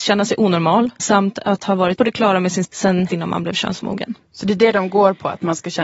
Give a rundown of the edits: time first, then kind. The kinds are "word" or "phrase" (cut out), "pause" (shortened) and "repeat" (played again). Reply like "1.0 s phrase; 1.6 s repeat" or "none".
1.0 s word; 2.0 s word; 2.6 s word; 3.1 s word